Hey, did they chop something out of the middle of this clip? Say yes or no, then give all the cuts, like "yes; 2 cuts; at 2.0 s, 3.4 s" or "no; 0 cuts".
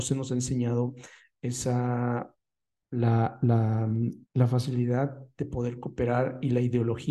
yes; 1 cut; at 4.2 s